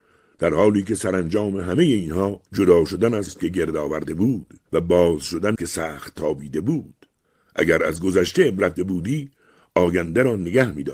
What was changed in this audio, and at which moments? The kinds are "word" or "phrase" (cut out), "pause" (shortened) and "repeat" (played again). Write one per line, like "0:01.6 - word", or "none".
0:02.5 - pause
0:03.3 - word
0:04.7 - pause
0:05.6 - phrase
0:07.2 - pause
0:08.8 - word